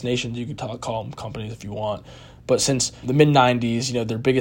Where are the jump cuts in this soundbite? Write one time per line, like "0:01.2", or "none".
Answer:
0:03.0